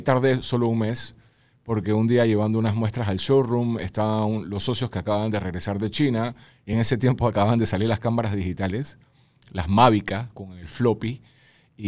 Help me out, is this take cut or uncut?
uncut